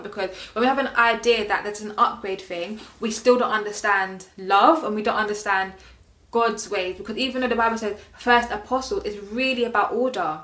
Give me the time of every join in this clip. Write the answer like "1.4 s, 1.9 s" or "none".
none